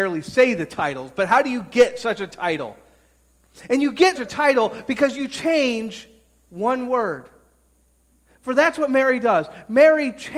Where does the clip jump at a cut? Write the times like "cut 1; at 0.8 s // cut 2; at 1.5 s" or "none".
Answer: cut 1; at 4.1 s